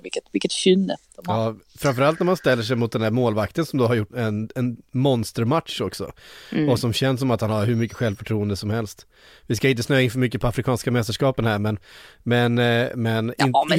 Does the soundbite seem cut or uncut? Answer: cut